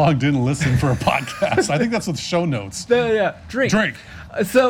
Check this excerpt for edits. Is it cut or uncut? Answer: uncut